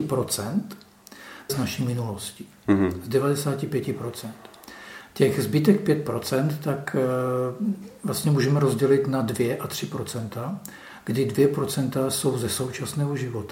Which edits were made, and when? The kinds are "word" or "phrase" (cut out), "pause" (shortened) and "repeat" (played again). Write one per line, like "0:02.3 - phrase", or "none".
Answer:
0:01.5 - word